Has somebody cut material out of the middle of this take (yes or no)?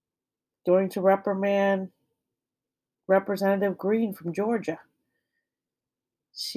no